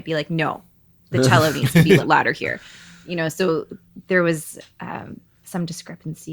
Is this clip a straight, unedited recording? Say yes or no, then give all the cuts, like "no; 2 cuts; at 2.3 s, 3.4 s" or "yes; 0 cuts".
no; 1 cut; at 2.0 s